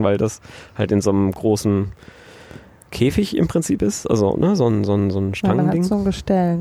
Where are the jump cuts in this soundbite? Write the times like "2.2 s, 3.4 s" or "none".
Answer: none